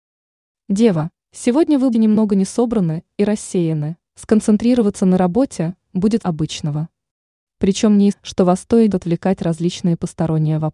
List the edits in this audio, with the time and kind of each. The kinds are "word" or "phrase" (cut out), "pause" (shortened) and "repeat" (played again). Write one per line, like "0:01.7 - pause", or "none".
0:01.2 - pause
0:01.9 - word
0:04.1 - pause
0:06.2 - word
0:08.1 - word
0:08.9 - phrase